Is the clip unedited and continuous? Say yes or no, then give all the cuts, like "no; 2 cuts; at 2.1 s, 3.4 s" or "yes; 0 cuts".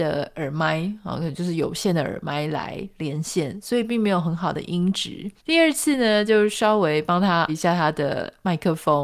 no; 2 cuts; at 5.4 s, 7.5 s